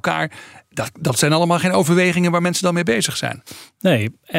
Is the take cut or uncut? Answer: uncut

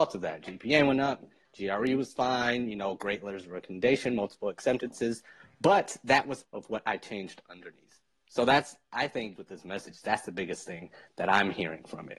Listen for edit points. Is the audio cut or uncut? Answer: cut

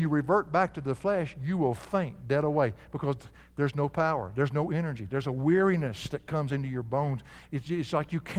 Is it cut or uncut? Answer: uncut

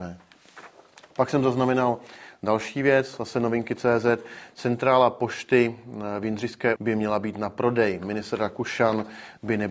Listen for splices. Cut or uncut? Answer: cut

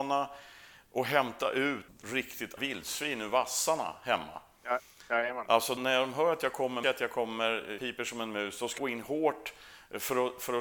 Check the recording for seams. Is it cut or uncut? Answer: cut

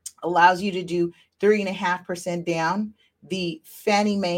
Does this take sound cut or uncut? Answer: uncut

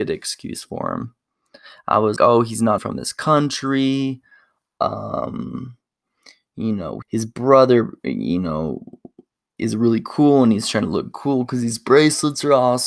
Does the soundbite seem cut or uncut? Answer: cut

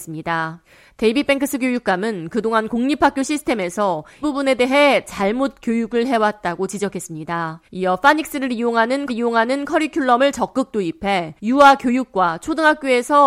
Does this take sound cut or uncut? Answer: cut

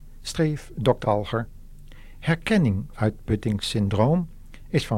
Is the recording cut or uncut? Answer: cut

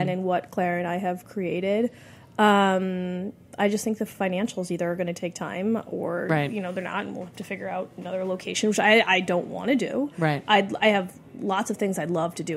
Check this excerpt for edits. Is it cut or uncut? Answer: uncut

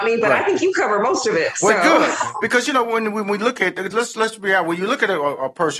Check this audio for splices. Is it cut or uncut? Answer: uncut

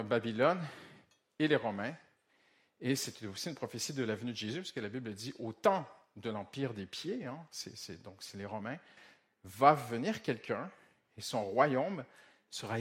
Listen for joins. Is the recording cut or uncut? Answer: uncut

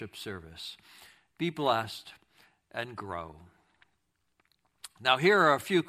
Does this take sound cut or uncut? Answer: uncut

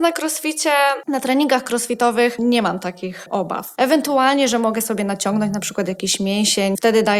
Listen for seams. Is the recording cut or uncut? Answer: uncut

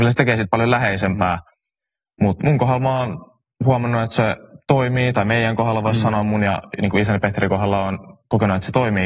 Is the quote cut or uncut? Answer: uncut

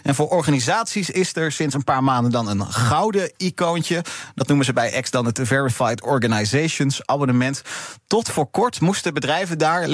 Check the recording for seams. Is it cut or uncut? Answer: uncut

